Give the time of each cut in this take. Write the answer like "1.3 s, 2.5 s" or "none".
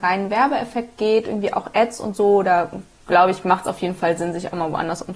none